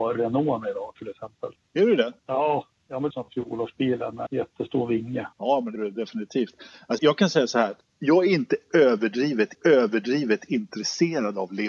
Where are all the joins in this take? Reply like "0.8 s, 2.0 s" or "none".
1.6 s, 2.2 s, 3.1 s, 4.3 s, 5.3 s, 5.8 s, 7.0 s, 7.8 s, 9.5 s